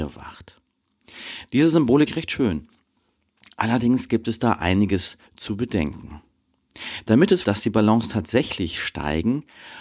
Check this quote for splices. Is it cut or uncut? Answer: cut